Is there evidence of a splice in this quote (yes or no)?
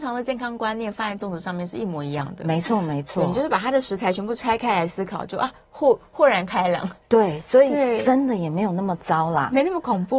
no